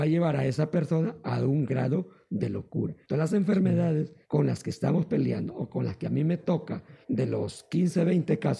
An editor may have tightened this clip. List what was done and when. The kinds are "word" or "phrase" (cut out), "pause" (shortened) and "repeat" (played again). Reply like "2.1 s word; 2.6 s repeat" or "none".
3.0 s pause; 4.2 s pause; 7.0 s pause